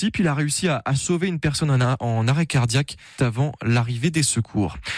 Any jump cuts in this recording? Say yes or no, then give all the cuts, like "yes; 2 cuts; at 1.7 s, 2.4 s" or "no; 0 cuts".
yes; 1 cut; at 3.2 s